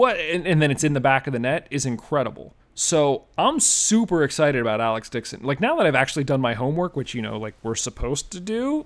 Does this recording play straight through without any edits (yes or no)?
no